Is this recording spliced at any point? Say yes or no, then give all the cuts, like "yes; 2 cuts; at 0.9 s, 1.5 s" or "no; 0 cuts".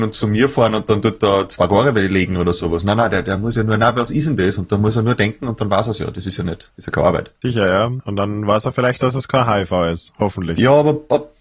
no; 0 cuts